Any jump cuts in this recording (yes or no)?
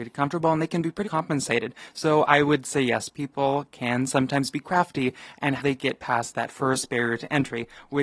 yes